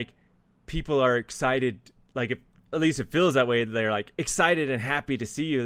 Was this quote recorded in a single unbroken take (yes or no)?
yes